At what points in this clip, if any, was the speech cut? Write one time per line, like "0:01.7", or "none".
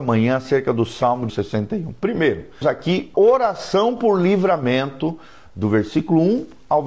0:01.3
0:02.6
0:03.1